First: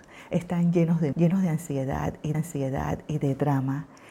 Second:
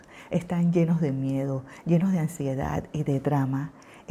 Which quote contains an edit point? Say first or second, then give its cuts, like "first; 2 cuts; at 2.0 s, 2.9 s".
first; 2 cuts; at 1.1 s, 2.3 s